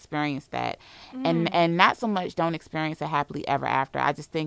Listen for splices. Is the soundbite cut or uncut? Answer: uncut